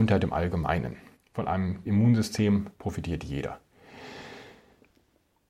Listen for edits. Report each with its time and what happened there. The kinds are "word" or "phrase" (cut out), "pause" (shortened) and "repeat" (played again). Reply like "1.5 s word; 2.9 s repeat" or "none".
1.2 s pause; 1.9 s word; 2.8 s pause